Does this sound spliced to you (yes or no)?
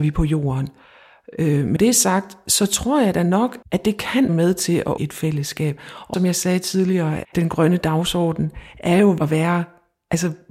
yes